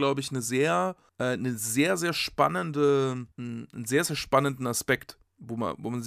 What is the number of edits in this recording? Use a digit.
2